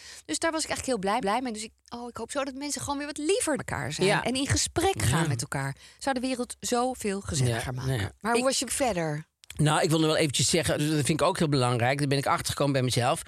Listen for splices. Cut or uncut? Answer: cut